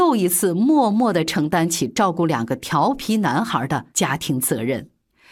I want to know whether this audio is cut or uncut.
cut